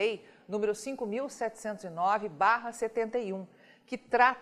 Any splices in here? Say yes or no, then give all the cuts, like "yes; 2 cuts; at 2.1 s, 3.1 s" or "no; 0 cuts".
no; 0 cuts